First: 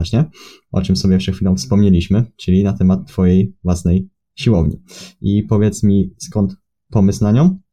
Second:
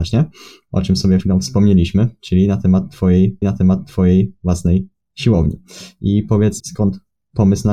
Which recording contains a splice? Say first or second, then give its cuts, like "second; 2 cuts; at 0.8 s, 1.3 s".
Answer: second; 3 cuts; at 1.2 s, 3.4 s, 6.6 s